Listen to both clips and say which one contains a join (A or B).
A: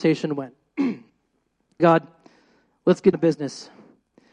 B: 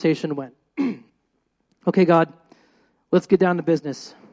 A